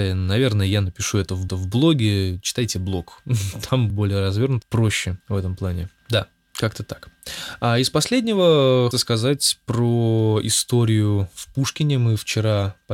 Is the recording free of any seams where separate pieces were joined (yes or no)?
no